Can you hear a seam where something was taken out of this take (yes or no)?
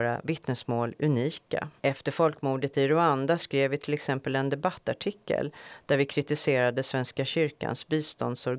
yes